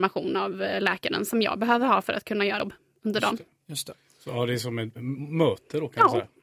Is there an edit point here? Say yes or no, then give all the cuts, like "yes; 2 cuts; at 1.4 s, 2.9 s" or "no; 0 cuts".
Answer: no; 0 cuts